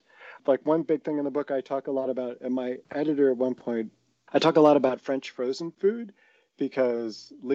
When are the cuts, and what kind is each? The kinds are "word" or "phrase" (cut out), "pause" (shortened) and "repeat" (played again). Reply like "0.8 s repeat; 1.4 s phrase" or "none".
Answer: none